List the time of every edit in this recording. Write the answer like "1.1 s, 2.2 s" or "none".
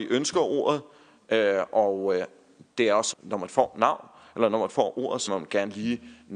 3.1 s, 5.3 s